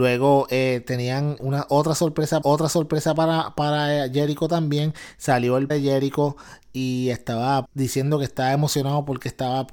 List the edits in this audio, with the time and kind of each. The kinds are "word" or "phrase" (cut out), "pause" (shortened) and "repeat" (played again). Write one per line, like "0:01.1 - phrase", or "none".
0:01.4 - word
0:02.4 - repeat
0:05.7 - word
0:07.6 - word